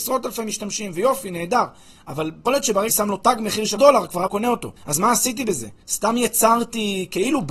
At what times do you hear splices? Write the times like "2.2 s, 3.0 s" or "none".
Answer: 2.5 s, 2.9 s, 3.8 s, 4.3 s, 4.8 s, 5.8 s